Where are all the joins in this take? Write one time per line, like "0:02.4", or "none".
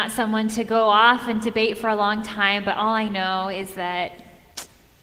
none

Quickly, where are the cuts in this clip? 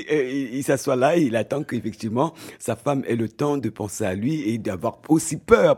none

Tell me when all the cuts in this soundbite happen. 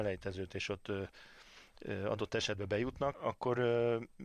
0:03.1

